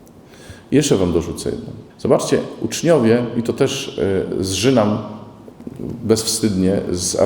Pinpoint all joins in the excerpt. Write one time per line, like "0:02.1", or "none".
0:01.9